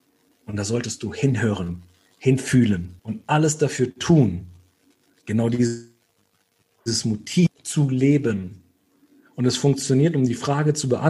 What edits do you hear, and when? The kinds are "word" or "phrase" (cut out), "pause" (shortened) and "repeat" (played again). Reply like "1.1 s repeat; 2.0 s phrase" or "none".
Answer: 3.0 s pause